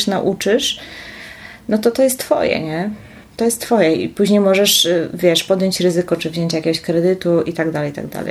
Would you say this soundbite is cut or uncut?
cut